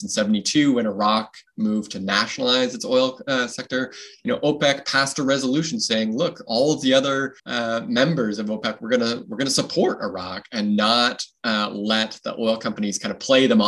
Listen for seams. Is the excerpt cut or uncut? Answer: cut